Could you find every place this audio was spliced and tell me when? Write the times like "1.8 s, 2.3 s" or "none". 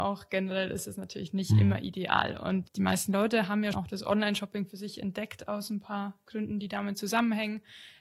2.7 s, 3.7 s